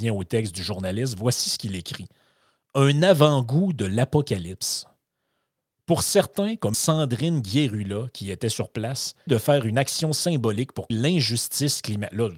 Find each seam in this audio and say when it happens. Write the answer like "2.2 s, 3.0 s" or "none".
6.7 s, 9.3 s, 10.9 s

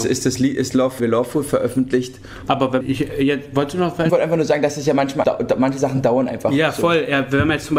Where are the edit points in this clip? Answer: 1.0 s, 2.8 s, 4.1 s, 5.2 s

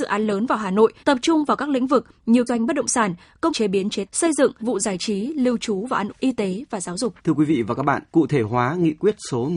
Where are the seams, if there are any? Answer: 1.0 s, 2.5 s, 3.5 s, 4.1 s, 4.6 s, 6.1 s, 7.2 s, 8.1 s

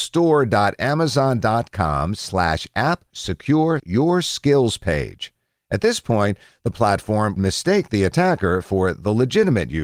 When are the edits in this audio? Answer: 3.1 s, 3.8 s, 7.4 s

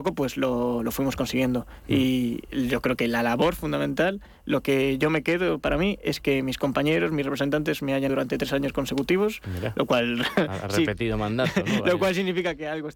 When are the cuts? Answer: 8.1 s

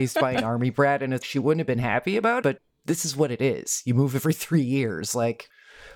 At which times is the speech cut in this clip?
1.2 s, 2.4 s

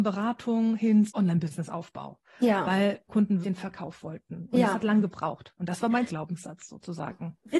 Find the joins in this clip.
1.1 s, 3.1 s, 3.4 s, 6.1 s

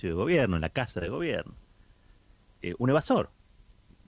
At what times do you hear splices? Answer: none

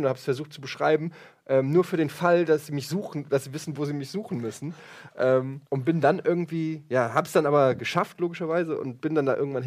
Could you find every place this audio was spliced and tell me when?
5.7 s

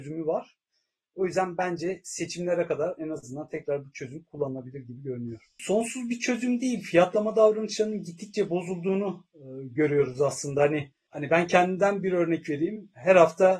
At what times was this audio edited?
5.5 s

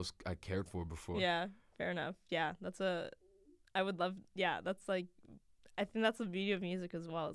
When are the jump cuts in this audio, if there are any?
1.2 s

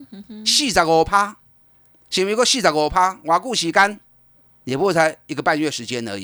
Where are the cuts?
none

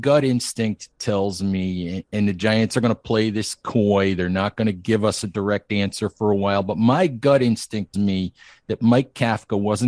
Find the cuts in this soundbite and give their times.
2.1 s, 7.9 s

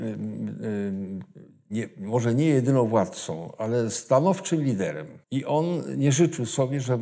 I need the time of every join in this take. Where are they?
5.2 s

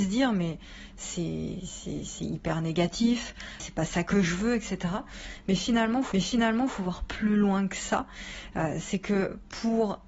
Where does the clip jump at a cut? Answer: 3.6 s, 6.1 s

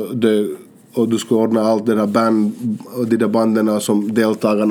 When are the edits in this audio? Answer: none

